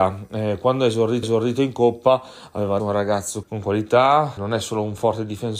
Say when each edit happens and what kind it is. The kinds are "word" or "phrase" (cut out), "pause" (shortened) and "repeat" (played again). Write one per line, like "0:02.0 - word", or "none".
0:01.2 - repeat
0:02.8 - phrase
0:03.4 - word
0:04.4 - word